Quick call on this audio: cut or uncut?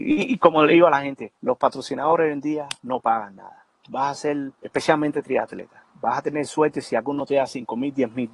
cut